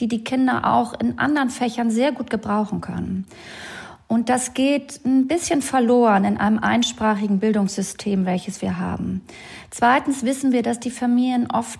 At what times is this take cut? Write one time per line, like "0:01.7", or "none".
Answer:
none